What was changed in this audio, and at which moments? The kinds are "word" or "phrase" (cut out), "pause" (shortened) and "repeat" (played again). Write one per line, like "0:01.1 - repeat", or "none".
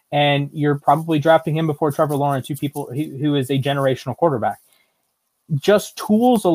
none